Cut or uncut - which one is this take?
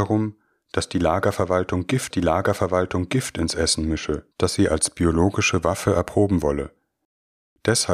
cut